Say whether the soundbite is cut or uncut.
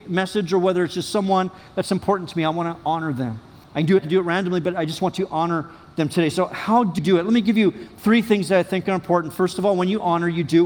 cut